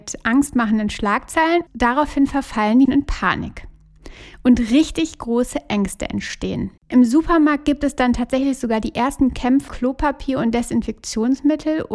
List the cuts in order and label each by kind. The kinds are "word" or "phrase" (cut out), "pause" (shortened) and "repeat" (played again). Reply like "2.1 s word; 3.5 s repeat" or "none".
1.7 s word; 2.8 s word; 6.8 s pause; 9.7 s word